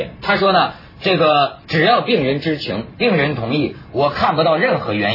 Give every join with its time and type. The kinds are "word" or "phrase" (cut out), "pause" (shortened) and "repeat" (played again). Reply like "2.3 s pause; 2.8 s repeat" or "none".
1.6 s pause